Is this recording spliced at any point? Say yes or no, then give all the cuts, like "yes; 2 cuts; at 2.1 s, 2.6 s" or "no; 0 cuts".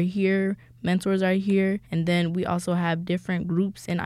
yes; 1 cut; at 1.8 s